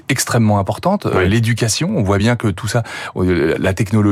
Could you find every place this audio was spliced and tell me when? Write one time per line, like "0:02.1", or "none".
none

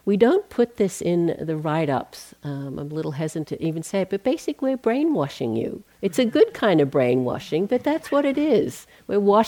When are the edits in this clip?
0:05.9

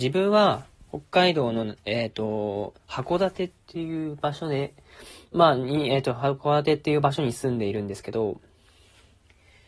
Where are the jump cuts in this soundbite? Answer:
0:01.8
0:02.8

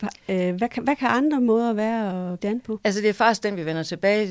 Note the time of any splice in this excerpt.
0:02.4

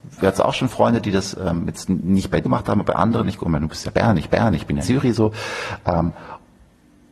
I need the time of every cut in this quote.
0:02.4
0:04.3
0:04.8

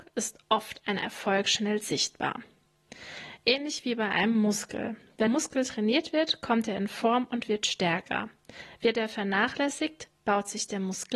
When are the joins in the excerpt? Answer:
0:05.3

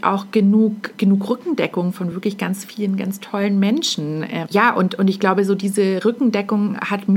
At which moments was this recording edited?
none

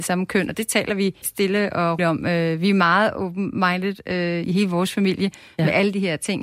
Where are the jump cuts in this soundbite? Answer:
0:01.2
0:02.0
0:04.4

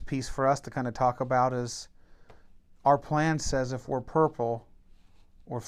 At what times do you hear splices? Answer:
none

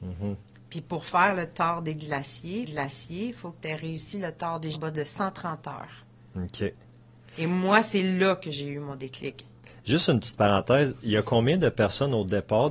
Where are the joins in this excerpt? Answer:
0:02.6
0:04.7

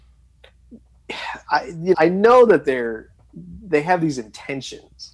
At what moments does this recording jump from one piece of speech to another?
0:01.9

